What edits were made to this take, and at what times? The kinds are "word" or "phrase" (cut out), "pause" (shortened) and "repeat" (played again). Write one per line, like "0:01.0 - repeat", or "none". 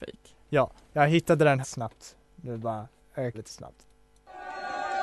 0:01.6 - phrase
0:03.3 - phrase